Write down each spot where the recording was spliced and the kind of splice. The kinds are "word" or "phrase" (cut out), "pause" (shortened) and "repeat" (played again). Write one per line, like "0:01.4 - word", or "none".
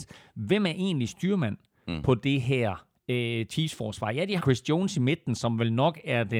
0:04.4 - word